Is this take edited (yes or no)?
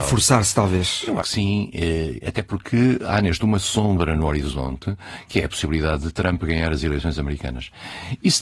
yes